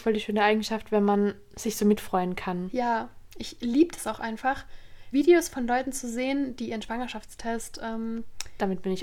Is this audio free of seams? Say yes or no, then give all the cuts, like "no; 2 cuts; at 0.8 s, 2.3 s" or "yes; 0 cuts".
no; 1 cut; at 5.1 s